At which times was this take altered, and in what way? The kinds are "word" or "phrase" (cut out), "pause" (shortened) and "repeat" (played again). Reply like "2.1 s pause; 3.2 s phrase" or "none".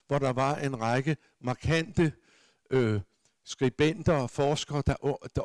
none